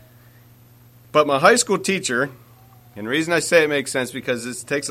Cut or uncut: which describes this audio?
uncut